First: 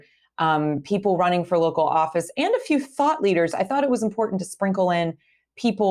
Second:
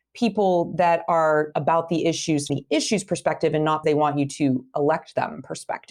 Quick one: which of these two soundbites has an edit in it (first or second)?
second